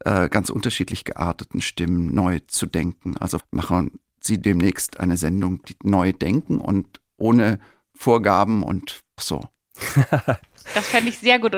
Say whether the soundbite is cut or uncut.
cut